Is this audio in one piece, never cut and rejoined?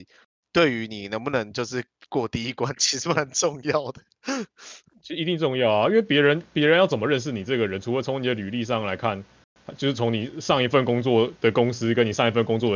yes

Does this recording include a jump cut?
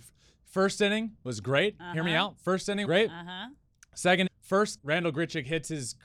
yes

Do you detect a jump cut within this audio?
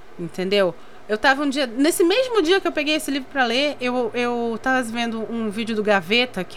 no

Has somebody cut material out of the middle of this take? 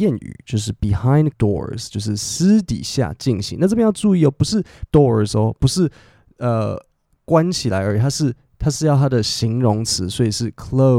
yes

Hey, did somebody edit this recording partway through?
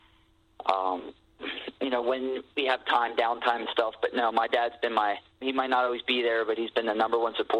no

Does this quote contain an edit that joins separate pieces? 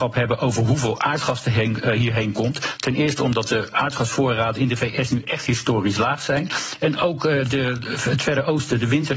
no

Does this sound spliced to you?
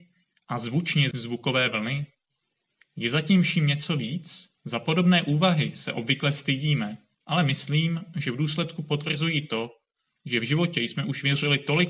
yes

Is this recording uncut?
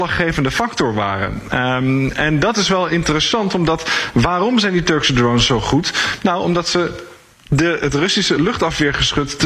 yes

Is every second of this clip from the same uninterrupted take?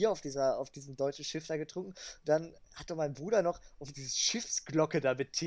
no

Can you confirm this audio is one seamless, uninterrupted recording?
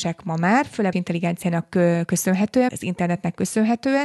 no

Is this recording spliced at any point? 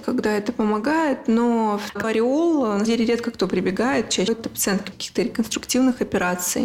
yes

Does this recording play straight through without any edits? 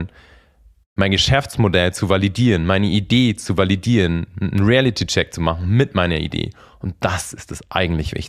yes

